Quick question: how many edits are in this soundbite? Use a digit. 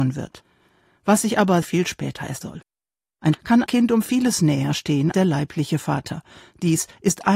5